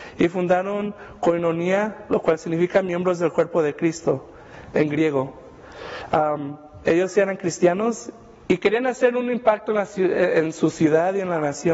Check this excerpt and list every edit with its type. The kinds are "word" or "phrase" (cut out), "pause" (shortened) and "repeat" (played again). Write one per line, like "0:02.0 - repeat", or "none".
none